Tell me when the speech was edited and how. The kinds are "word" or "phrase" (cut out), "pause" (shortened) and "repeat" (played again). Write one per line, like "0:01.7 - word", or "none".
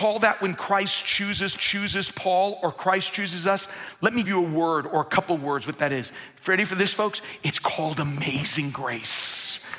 0:01.6 - repeat
0:04.2 - word